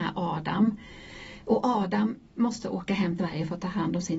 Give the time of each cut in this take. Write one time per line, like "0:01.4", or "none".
0:03.2